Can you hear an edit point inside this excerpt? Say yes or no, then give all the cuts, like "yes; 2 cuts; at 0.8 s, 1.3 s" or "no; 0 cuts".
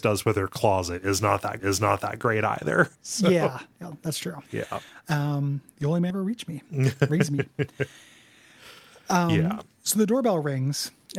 yes; 4 cuts; at 1.6 s, 2.9 s, 4.5 s, 6.1 s